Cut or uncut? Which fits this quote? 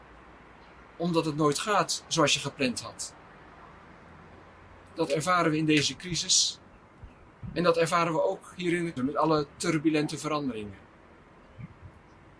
cut